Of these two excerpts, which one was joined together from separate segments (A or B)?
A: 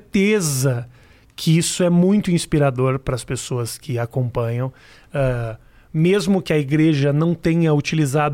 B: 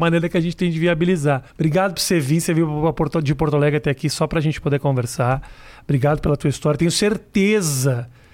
B